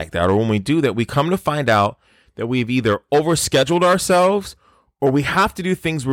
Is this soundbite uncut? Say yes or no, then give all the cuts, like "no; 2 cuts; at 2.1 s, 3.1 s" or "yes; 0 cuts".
yes; 0 cuts